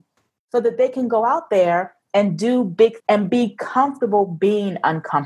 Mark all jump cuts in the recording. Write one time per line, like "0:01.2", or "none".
0:03.0